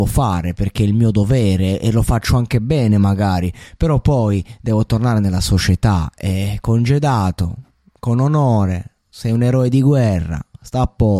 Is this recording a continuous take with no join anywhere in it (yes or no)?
yes